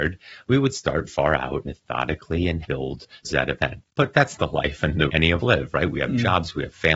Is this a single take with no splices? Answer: no; 7 cuts; at 1.1 s, 1.7 s, 2.6 s, 3.2 s, 4.4 s, 5.1 s, 5.4 s

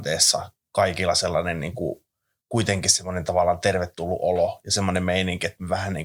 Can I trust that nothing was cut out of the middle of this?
yes; 0 cuts

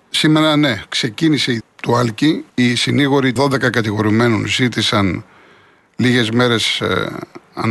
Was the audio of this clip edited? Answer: yes; 3 cuts; at 1.6 s, 2.5 s, 3.4 s

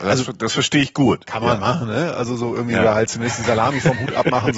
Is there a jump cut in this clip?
no; 0 cuts

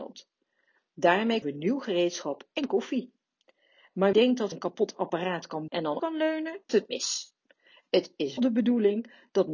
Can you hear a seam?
yes; 7 cuts; at 1.4 s, 4.1 s, 4.5 s, 5.7 s, 6.0 s, 6.7 s, 8.4 s

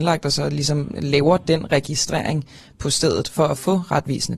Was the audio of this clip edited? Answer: no; 0 cuts

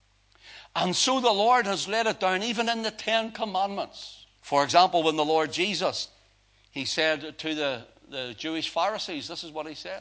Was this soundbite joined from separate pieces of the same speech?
yes; 1 cut; at 4.4 s

